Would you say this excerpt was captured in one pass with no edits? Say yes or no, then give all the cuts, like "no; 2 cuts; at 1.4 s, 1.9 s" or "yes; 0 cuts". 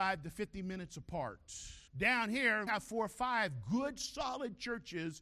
no; 2 cuts; at 1.9 s, 2.7 s